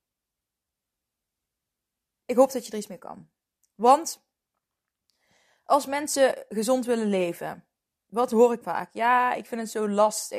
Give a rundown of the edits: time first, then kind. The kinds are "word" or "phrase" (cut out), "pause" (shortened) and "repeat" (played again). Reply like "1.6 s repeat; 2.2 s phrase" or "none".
8.6 s word